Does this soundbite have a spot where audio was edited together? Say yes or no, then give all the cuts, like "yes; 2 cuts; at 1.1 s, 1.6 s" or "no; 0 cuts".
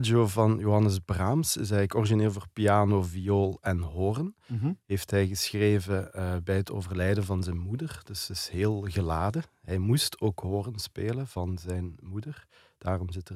no; 0 cuts